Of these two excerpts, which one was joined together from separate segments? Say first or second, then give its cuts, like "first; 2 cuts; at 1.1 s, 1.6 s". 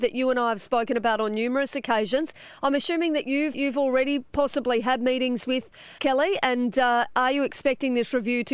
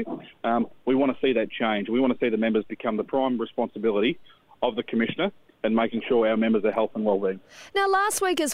first; 2 cuts; at 3.5 s, 6.0 s